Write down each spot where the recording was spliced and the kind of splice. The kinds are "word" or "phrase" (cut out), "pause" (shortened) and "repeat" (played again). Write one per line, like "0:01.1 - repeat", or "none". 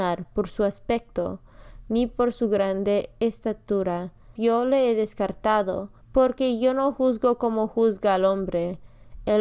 0:04.4 - word
0:06.0 - pause